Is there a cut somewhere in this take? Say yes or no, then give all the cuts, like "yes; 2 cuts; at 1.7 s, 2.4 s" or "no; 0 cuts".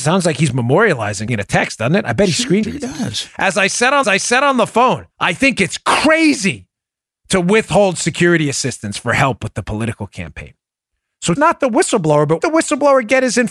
yes; 6 cuts; at 1.3 s, 2.6 s, 4.0 s, 5.1 s, 11.4 s, 12.4 s